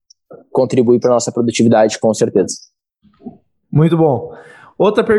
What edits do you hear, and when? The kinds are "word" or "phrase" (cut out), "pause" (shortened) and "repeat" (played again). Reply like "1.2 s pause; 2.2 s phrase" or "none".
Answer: none